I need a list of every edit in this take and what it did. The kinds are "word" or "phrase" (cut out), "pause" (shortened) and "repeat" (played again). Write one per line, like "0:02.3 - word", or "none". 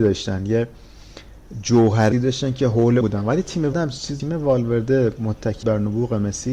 0:02.1 - word
0:03.0 - word
0:03.7 - word
0:04.2 - word
0:05.6 - word